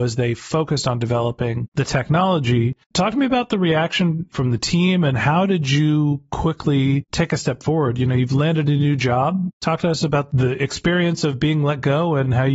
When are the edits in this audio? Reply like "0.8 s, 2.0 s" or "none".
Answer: 2.8 s